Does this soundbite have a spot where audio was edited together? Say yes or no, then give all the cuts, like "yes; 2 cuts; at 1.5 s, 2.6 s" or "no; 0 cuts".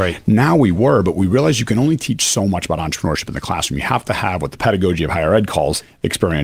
no; 0 cuts